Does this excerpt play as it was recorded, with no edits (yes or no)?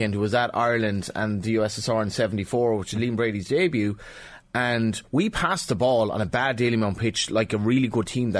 yes